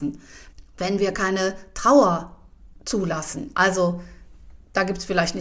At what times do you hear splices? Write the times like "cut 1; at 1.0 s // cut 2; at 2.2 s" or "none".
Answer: none

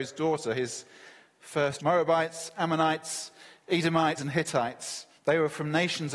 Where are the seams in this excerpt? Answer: cut 1; at 1.8 s // cut 2; at 4.2 s // cut 3; at 5.2 s

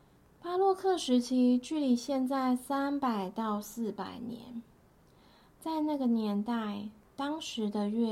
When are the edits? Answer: none

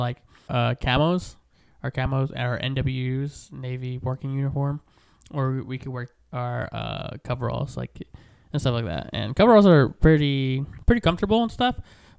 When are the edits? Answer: none

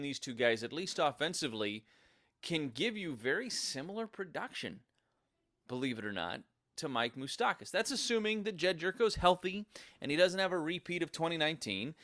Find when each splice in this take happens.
none

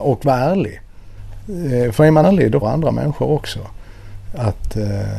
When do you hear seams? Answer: cut 1; at 2.2 s // cut 2; at 2.6 s

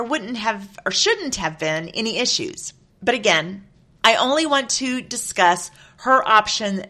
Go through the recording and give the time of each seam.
none

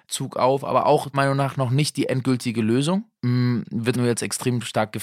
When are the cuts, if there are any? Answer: cut 1; at 1.1 s // cut 2; at 3.1 s // cut 3; at 3.9 s

